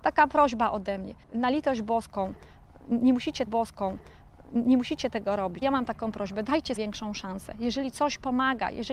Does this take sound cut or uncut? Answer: cut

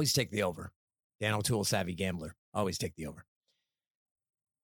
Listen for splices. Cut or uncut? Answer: uncut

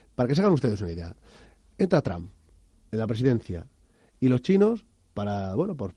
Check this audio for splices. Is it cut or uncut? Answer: uncut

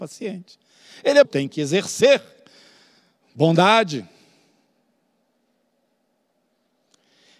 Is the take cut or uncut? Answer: cut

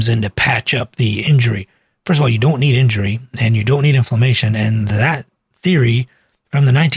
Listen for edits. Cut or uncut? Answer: uncut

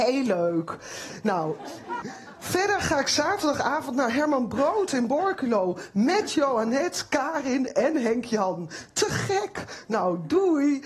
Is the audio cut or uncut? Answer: cut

